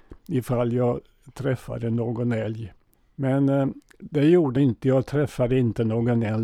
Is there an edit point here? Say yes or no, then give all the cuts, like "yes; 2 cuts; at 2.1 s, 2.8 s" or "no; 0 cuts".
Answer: yes; 2 cuts; at 2.9 s, 4.6 s